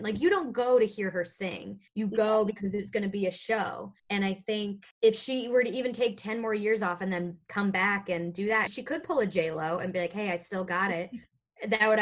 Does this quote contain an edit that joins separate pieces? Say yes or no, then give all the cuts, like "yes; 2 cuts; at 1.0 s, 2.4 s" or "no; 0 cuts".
yes; 4 cuts; at 1.9 s, 4.0 s, 4.9 s, 8.7 s